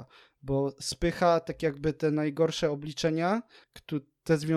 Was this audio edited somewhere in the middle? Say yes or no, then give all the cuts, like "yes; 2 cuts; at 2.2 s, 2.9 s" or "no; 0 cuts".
no; 0 cuts